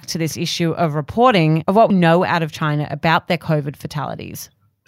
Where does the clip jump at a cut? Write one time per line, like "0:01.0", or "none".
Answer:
0:01.9